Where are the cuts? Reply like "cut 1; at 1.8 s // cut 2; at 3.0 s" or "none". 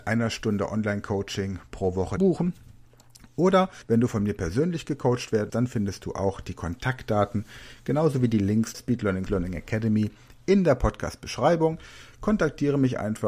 cut 1; at 2.2 s // cut 2; at 3.8 s // cut 3; at 5.5 s // cut 4; at 8.7 s // cut 5; at 9.3 s

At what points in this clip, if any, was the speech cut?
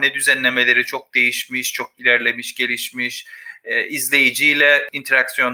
none

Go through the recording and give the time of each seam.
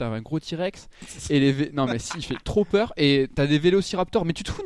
none

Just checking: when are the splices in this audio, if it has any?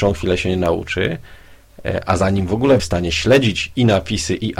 cut 1; at 2.8 s

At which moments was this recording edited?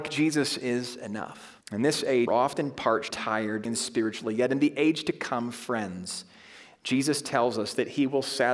cut 1; at 1.6 s // cut 2; at 2.3 s // cut 3; at 3.1 s // cut 4; at 3.7 s

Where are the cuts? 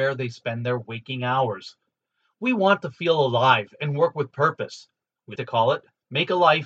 cut 1; at 5.4 s

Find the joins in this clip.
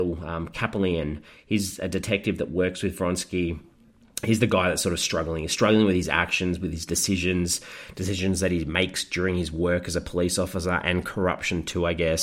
none

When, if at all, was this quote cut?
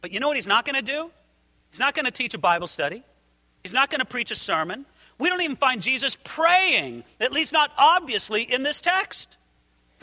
none

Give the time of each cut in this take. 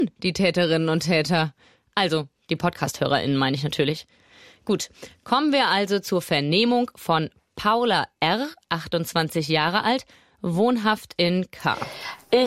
none

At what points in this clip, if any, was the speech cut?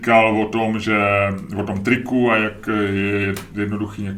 none

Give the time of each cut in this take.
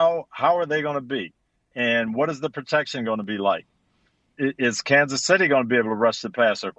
none

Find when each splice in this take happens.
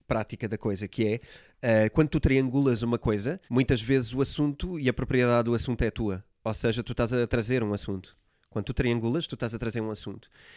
cut 1; at 3.5 s

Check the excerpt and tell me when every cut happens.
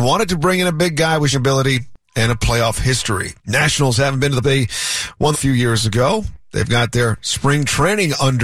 cut 1; at 1.3 s // cut 2; at 3.4 s // cut 3; at 4.4 s // cut 4; at 5.3 s

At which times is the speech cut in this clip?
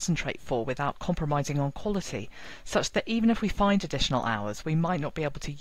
none

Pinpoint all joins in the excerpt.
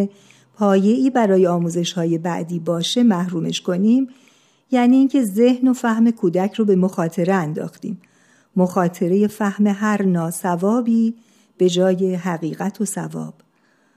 none

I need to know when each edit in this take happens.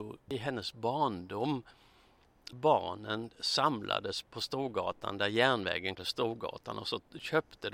cut 1; at 2.5 s // cut 2; at 4.2 s // cut 3; at 6.0 s

